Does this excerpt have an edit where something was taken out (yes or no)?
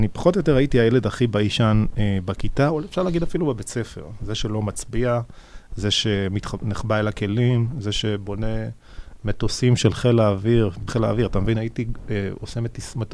yes